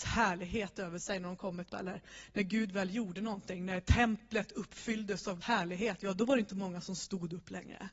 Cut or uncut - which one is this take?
cut